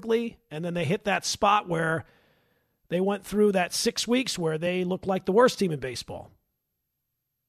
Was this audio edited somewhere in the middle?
no; 0 cuts

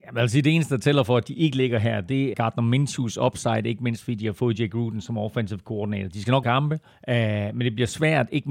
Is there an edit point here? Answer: yes; 3 cuts; at 2.3 s, 6.4 s, 6.9 s

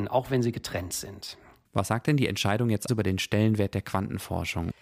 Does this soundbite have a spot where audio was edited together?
yes; 1 cut; at 2.9 s

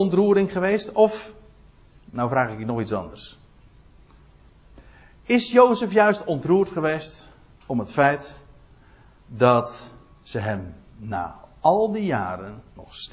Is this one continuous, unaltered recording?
yes; 0 cuts

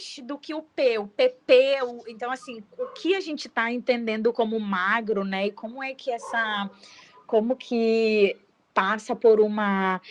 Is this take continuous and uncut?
yes; 0 cuts

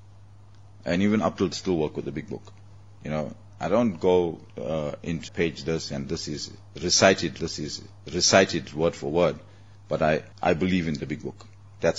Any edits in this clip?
yes; 5 cuts; at 1.5 s, 4.5 s, 5.3 s, 7.4 s, 10.3 s

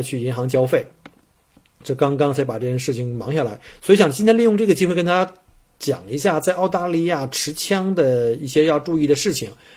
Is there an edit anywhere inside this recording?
no; 0 cuts

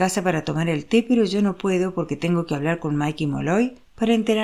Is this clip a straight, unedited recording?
yes; 0 cuts

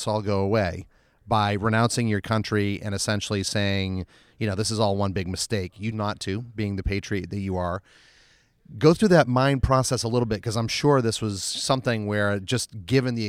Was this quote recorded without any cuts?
no; 1 cut; at 5.9 s

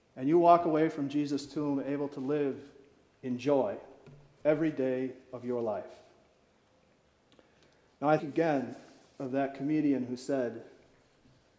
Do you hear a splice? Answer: yes; 1 cut; at 8.2 s

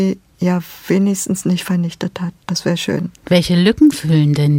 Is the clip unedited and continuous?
no; 1 cut; at 3.2 s

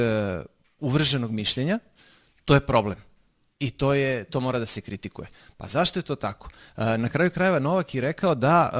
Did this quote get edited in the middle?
no; 0 cuts

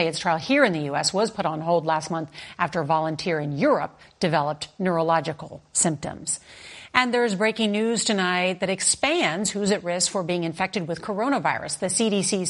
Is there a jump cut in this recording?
no; 0 cuts

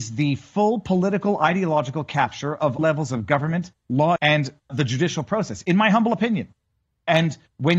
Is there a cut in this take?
yes; 3 cuts; at 2.8 s, 4.2 s, 4.7 s

